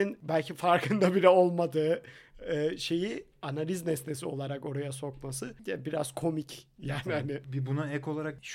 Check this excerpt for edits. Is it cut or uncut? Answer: uncut